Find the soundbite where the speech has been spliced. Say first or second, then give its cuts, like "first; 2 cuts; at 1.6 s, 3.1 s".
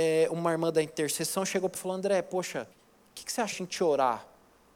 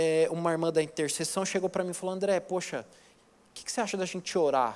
first; 3 cuts; at 1.7 s, 2.7 s, 3.5 s